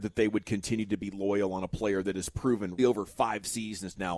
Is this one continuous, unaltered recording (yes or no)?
no